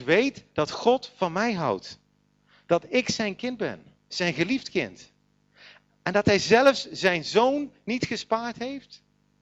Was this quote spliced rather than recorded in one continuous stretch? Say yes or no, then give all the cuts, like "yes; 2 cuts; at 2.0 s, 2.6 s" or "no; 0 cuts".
yes; 1 cut; at 4.0 s